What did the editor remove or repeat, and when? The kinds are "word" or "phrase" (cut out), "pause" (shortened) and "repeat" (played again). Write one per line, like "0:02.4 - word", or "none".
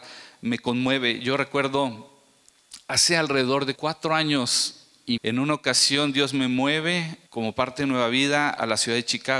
0:03.8 - word
0:05.2 - word
0:07.3 - pause